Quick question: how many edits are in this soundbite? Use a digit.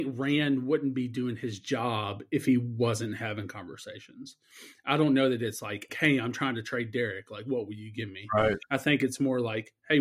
1